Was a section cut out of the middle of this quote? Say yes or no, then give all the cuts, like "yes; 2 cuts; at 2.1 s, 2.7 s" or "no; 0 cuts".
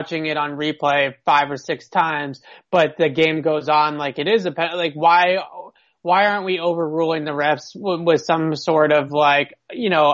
no; 0 cuts